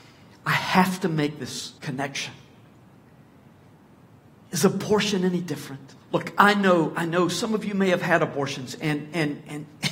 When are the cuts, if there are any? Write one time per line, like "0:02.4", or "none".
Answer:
0:01.8
0:06.0